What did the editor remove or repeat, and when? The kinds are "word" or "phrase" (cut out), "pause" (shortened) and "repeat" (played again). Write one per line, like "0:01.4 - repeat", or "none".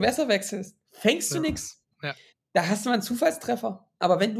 0:01.9 - pause